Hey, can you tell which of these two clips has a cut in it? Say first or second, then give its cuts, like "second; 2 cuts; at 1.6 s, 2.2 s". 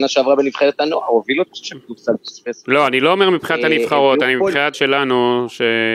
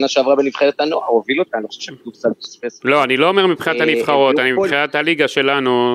first; 2 cuts; at 1.5 s, 4.7 s